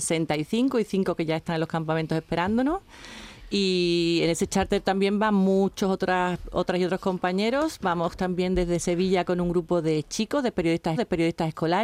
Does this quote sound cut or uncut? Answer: cut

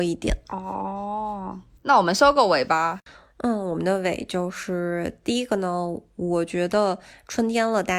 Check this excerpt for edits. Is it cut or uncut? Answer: cut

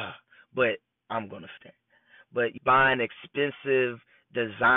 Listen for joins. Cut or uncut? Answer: cut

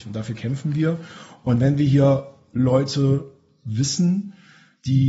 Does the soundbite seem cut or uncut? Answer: uncut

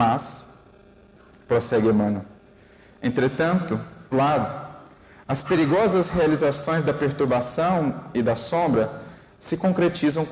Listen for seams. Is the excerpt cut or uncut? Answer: cut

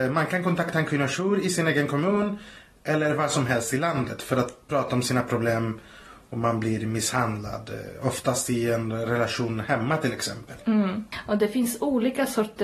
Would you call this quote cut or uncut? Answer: uncut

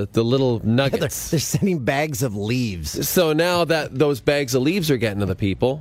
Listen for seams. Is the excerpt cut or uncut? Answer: uncut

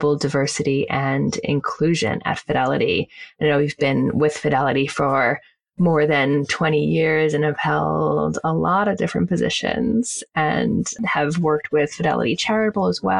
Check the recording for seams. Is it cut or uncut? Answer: uncut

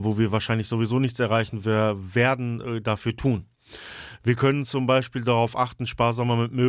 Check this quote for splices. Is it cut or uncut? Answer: uncut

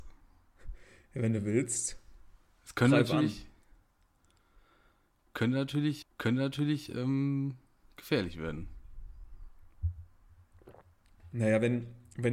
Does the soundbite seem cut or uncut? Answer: cut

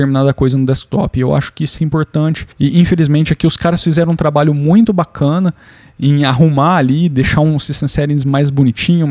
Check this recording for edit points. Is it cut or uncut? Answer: cut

